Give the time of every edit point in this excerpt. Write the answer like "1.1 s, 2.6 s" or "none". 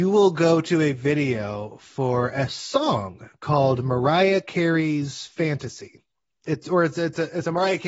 none